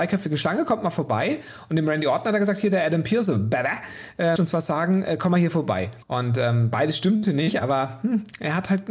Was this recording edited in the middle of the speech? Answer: yes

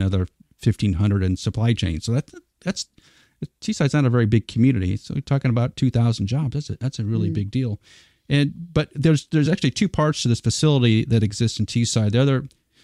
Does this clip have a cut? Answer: no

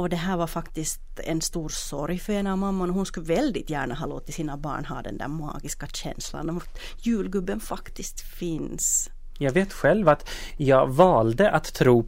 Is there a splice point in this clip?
no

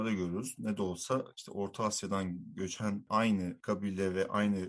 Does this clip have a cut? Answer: no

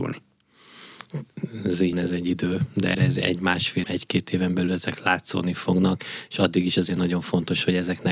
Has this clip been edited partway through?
yes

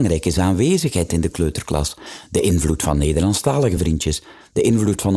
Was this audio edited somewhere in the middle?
no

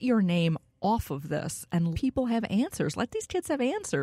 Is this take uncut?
no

